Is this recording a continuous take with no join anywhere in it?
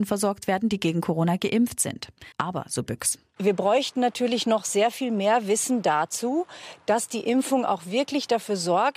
no; 1 cut; at 2.3 s

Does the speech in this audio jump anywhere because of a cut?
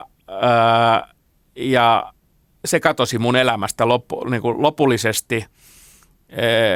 no; 0 cuts

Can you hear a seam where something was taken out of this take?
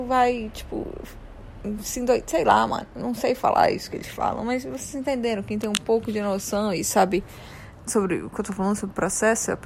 no; 0 cuts

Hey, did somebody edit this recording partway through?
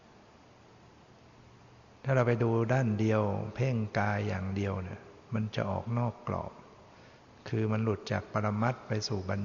yes; 1 cut; at 7.2 s

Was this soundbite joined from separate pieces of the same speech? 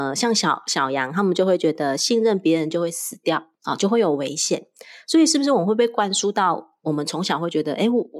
yes; 1 cut; at 3.5 s

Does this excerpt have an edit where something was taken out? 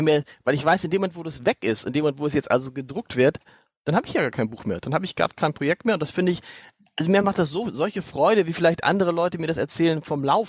no; 0 cuts

